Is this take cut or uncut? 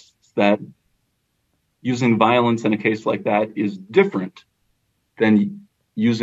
uncut